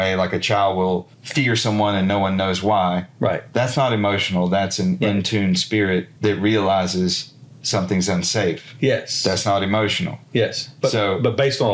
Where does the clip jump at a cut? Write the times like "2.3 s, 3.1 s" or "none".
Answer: 1.1 s, 6.2 s